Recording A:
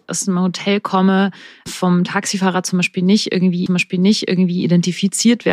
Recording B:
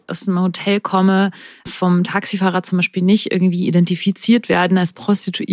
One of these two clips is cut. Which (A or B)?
A